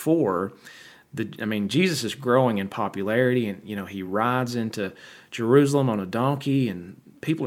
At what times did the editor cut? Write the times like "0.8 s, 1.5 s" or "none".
none